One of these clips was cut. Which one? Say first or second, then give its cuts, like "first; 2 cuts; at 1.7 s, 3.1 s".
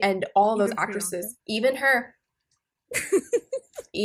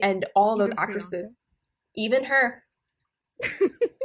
first; 1 cut; at 1.4 s